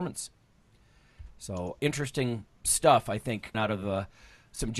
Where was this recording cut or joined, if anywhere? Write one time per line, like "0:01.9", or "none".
0:01.8
0:03.5